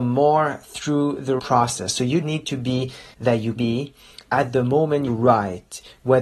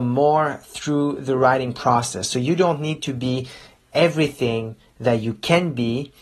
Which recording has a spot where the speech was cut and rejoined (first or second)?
first